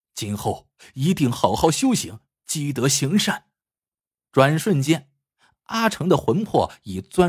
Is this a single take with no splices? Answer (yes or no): no